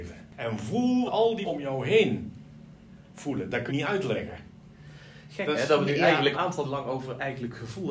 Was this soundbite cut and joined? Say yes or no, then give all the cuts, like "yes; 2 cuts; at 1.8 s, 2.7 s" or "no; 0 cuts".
yes; 6 cuts; at 1.1 s, 1.4 s, 3.7 s, 5.9 s, 6.3 s, 6.6 s